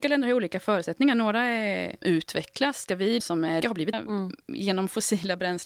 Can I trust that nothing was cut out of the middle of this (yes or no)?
no